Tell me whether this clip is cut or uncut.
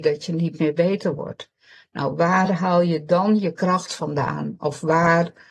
uncut